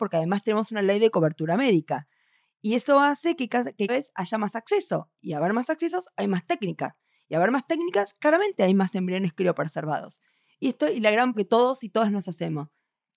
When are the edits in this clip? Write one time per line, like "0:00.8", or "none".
0:03.9
0:11.3